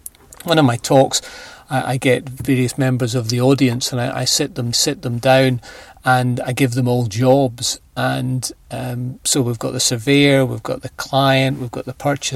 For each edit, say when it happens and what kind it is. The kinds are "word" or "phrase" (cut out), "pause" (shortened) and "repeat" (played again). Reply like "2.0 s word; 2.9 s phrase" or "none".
4.7 s repeat